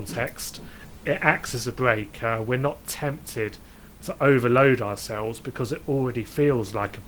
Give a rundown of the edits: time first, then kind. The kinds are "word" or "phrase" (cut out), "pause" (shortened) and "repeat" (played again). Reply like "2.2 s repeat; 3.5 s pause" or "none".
none